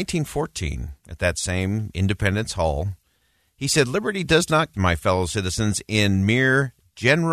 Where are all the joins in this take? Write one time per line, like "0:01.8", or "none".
0:01.0
0:04.7